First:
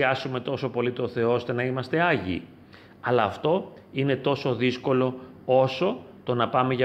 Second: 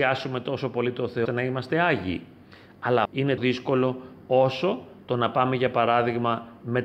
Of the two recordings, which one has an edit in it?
second; 3 cuts; at 1.2 s, 3.0 s, 3.4 s

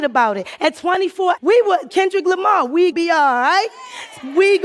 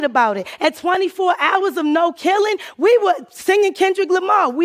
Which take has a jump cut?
first; 3 cuts; at 1.4 s, 1.9 s, 2.9 s

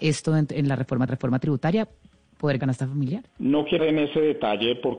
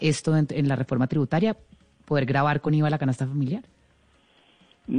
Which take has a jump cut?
first; 4 cuts; at 1.1 s, 2.6 s, 3.3 s, 3.8 s

